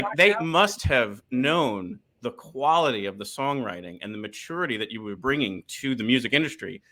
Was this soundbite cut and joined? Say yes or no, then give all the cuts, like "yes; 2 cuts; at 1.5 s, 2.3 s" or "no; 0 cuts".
no; 0 cuts